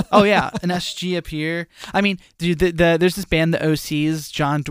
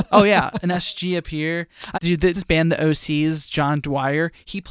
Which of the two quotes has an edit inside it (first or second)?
second